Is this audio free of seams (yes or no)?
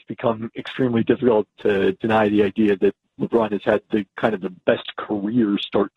yes